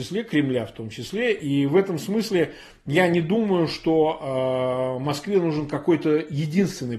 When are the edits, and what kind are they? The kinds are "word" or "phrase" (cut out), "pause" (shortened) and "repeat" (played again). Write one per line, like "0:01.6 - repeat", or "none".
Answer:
none